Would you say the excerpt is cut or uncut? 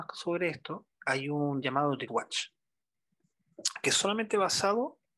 cut